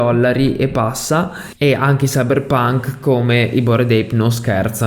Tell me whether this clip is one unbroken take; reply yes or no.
yes